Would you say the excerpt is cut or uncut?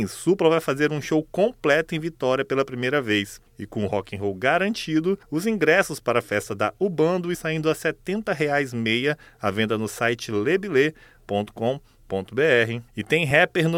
cut